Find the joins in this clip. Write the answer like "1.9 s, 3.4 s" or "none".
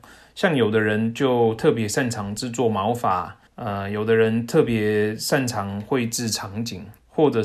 3.5 s